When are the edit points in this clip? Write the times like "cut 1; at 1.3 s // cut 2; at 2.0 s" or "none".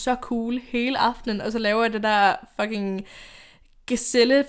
none